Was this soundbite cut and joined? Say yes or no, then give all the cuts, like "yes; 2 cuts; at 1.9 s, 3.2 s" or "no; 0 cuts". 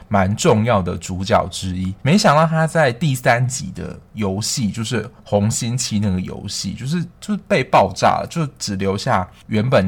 yes; 2 cuts; at 2.0 s, 7.1 s